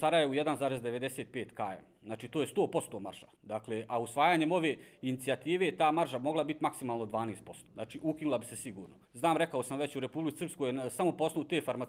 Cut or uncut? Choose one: cut